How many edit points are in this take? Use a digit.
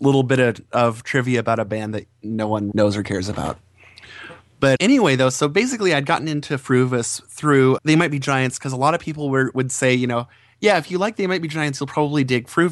3